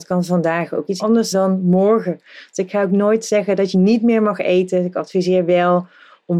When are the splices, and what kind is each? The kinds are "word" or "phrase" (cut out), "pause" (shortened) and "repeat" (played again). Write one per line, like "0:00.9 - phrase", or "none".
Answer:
0:01.0 - word
0:01.3 - word
0:03.7 - phrase